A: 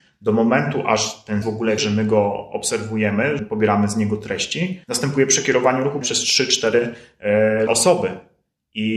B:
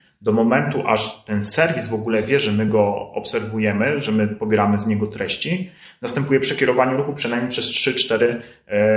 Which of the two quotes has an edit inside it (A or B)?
A